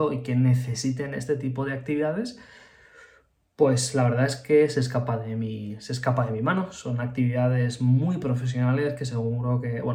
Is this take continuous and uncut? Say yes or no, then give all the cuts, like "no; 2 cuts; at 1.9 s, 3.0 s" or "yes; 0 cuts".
yes; 0 cuts